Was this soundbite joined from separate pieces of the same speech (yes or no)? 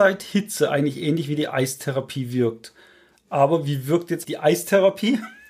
yes